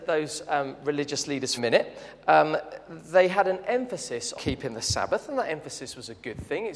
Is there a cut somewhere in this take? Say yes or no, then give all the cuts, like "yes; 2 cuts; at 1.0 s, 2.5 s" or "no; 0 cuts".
yes; 2 cuts; at 1.6 s, 4.4 s